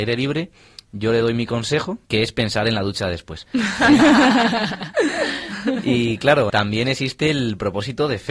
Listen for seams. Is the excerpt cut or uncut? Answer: cut